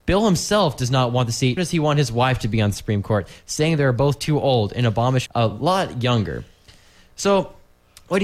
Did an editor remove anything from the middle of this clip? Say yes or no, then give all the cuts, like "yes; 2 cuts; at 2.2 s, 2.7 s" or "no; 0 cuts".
yes; 2 cuts; at 1.6 s, 5.3 s